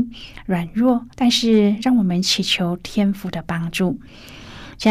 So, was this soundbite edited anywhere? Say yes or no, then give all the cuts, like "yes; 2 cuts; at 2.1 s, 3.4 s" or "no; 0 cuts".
yes; 1 cut; at 1.1 s